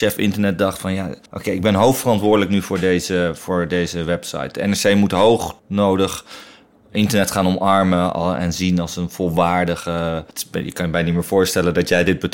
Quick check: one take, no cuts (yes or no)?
no